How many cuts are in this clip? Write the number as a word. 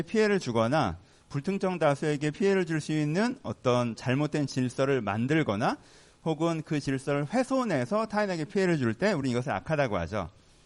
zero